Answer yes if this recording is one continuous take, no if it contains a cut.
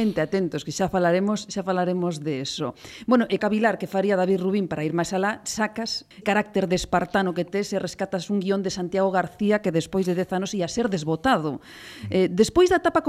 no